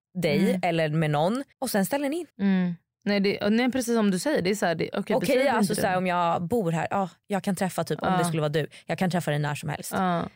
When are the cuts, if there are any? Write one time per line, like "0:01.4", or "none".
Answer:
0:01.5
0:02.3

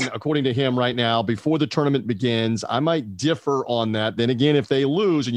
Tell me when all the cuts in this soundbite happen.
none

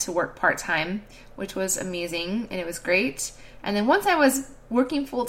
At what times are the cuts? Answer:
none

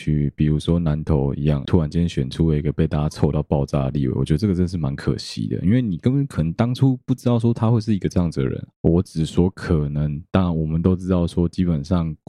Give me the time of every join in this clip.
0:01.7

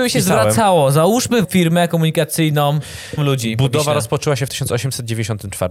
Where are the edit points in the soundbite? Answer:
0:01.4
0:03.2

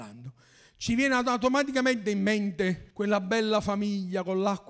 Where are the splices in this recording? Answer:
0:02.9

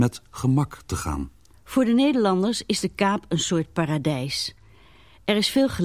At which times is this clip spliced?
none

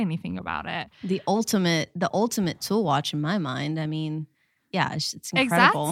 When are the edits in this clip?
none

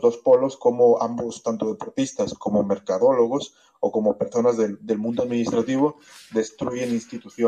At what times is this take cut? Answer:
none

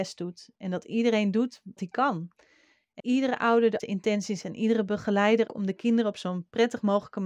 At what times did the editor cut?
0:01.8
0:03.0
0:03.8
0:04.4
0:05.5

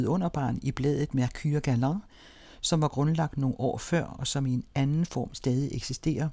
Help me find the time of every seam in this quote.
none

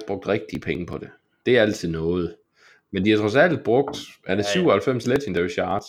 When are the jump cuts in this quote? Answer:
none

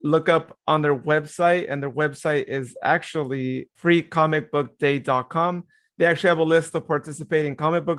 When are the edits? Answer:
none

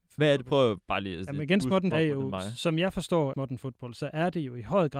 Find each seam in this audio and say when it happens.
0:01.9
0:03.3

